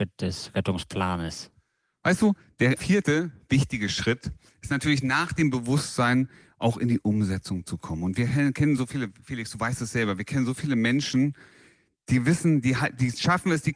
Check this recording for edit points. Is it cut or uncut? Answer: uncut